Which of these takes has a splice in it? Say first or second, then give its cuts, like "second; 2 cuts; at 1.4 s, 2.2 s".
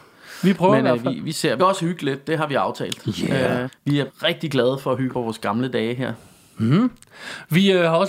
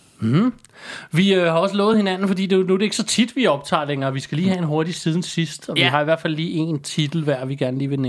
first; 4 cuts; at 1.6 s, 3.7 s, 4.1 s, 5.1 s